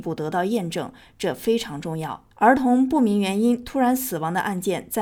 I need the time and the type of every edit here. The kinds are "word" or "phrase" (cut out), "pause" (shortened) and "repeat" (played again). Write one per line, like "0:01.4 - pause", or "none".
0:02.3 - pause